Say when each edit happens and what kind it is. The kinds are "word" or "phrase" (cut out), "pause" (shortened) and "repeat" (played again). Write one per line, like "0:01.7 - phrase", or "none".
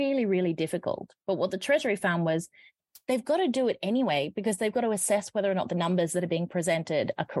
none